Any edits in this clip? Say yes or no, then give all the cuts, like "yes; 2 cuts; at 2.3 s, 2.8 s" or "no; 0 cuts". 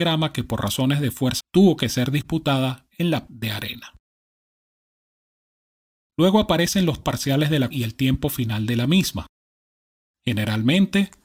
yes; 4 cuts; at 1.4 s, 3.3 s, 7.0 s, 7.7 s